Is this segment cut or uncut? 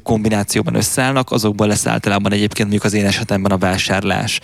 uncut